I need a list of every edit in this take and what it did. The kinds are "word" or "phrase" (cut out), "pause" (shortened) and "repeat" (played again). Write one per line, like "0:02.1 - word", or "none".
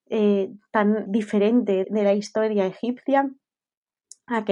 0:01.1 - word
0:01.8 - word